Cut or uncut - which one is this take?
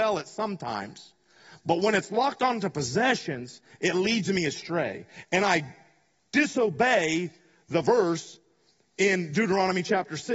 uncut